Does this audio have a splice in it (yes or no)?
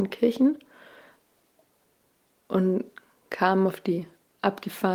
no